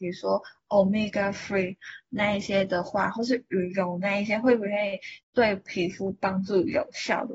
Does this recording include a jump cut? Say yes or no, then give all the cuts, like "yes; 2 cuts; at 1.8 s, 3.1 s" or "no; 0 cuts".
yes; 1 cut; at 5.2 s